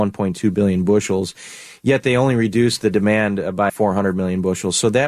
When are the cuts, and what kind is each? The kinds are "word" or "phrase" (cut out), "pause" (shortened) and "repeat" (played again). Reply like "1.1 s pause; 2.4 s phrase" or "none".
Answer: 3.7 s word